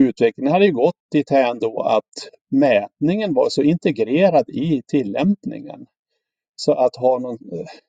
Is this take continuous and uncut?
yes; 0 cuts

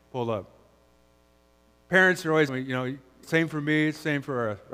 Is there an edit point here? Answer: yes; 2 cuts; at 2.5 s, 3.2 s

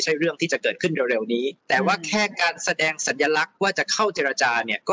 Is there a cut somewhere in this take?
yes; 1 cut; at 1.6 s

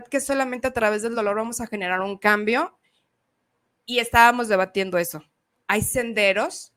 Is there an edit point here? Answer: no; 0 cuts

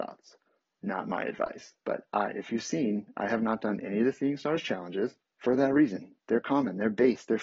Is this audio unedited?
no; 2 cuts; at 1.8 s, 5.2 s

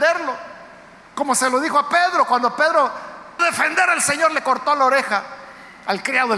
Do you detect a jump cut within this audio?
yes; 1 cut; at 3.4 s

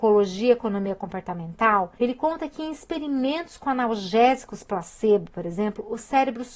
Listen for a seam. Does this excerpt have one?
yes; 1 cut; at 2.0 s

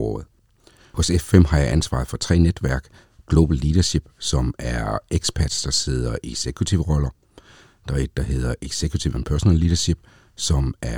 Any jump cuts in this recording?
no; 0 cuts

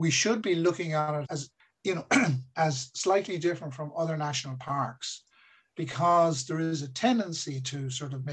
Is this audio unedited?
no; 1 cut; at 1.2 s

